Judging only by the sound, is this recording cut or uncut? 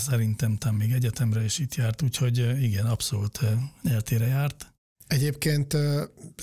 uncut